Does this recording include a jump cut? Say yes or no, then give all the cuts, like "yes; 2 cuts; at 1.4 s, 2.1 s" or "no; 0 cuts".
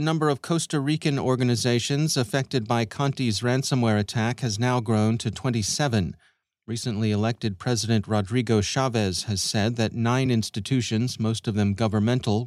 no; 0 cuts